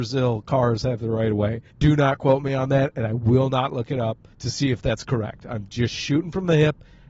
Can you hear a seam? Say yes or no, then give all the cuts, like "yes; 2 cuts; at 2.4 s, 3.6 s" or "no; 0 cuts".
yes; 2 cuts; at 1.7 s, 4.3 s